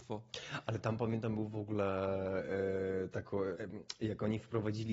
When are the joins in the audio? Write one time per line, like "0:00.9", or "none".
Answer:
0:03.5